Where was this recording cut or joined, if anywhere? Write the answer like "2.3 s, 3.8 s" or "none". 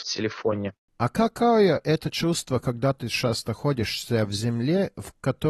none